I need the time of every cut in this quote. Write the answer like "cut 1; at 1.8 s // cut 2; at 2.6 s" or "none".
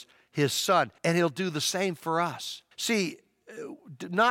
cut 1; at 1.0 s // cut 2; at 2.7 s